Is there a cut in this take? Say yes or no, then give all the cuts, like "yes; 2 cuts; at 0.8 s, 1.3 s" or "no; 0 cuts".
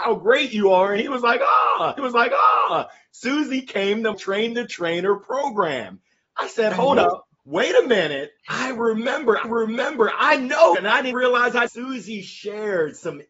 yes; 8 cuts; at 2.0 s, 4.1 s, 7.4 s, 8.4 s, 9.4 s, 10.7 s, 11.1 s, 11.7 s